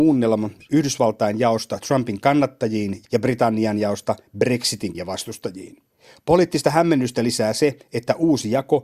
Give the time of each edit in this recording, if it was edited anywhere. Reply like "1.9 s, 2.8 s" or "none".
3.0 s, 4.9 s